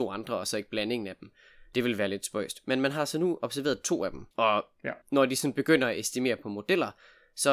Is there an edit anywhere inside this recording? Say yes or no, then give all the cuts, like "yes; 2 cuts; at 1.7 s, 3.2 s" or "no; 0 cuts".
yes; 2 cuts; at 4.3 s, 5.0 s